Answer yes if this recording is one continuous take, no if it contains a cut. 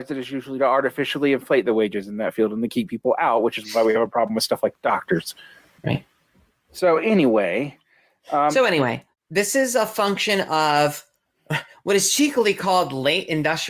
yes